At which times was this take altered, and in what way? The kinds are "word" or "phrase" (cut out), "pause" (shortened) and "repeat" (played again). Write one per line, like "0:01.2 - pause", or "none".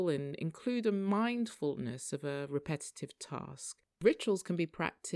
none

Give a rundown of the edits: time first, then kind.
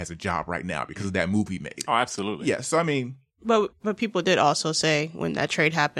none

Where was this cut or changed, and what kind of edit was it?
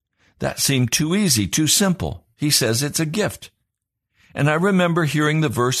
none

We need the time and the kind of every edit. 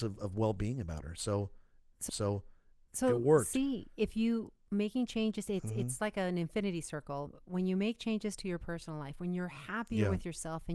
0:02.1 - repeat

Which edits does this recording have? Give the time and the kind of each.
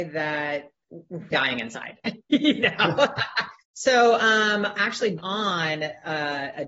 0:01.3 - phrase
0:03.6 - pause
0:04.8 - word
0:05.2 - word

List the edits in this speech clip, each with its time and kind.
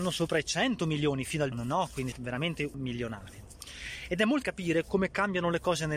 0:01.5 - word
0:02.1 - word
0:02.7 - word
0:04.4 - word

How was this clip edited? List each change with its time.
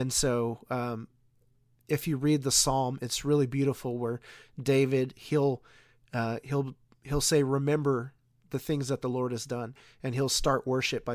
none

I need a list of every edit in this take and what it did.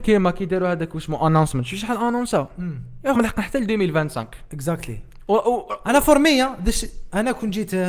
0:03.1 - word

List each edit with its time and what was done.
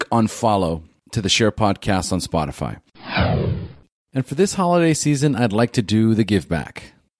none

